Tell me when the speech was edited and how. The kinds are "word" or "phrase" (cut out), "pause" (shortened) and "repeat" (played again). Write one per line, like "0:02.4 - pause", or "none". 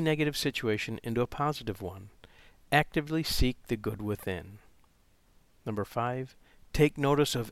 none